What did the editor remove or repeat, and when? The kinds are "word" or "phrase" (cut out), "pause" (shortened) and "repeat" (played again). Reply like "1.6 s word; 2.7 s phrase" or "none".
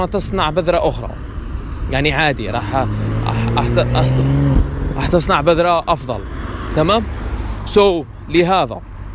none

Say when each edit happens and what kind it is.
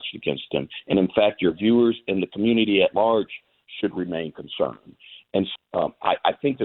5.6 s word

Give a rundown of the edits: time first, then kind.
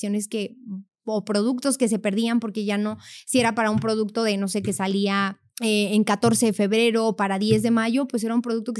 5.5 s pause

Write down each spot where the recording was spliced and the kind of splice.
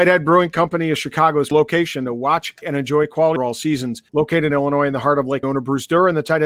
1.5 s word; 2.6 s word; 3.4 s phrase; 4.1 s pause; 4.5 s word; 5.4 s word

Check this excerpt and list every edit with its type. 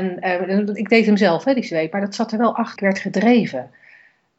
2.8 s phrase

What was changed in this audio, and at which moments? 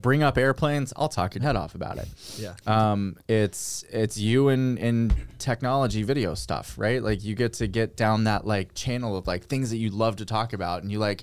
none

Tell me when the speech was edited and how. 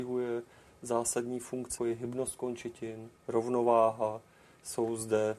1.8 s word; 3.2 s pause

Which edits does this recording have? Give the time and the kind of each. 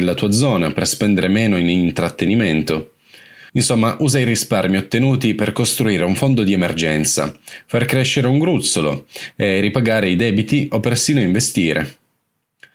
3.5 s pause

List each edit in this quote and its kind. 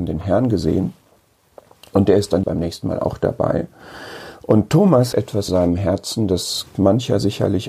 2.4 s word; 5.1 s word; 5.5 s word; 6.7 s word

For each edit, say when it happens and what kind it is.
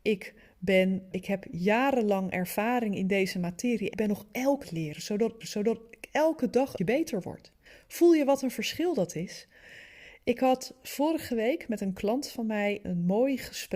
1.1 s word; 3.9 s word; 4.6 s phrase; 5.4 s repeat; 6.8 s word; 7.7 s pause; 12.8 s word

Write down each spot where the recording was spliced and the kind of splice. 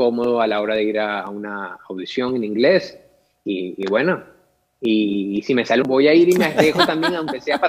5.8 s phrase

